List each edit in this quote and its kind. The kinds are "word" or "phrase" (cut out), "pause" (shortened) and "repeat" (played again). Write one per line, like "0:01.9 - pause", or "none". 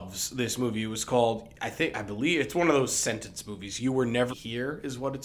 0:04.3 - word